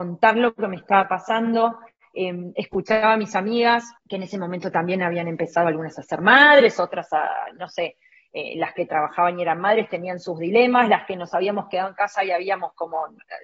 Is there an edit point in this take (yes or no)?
yes